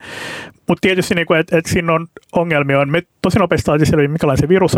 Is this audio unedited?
no; 1 cut; at 3.1 s

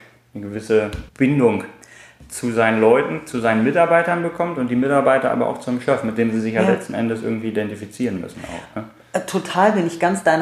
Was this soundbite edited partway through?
yes; 1 cut; at 1.1 s

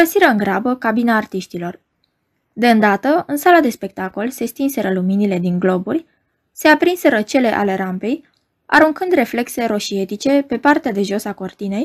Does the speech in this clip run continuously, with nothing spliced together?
yes; 0 cuts

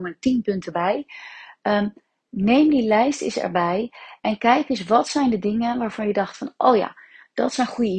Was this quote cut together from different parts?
no; 0 cuts

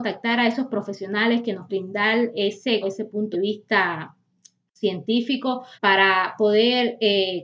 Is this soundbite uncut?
no; 4 cuts; at 1.7 s, 2.8 s, 3.3 s, 5.7 s

